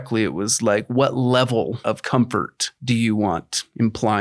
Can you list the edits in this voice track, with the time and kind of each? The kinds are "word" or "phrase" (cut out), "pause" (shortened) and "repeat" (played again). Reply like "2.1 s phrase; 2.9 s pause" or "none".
none